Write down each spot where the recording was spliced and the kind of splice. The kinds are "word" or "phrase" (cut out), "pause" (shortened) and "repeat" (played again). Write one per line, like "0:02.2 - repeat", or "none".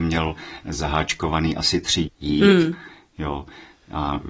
0:02.1 - phrase